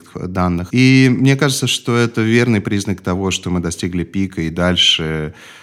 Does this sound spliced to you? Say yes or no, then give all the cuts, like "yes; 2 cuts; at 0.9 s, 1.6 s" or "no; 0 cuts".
no; 0 cuts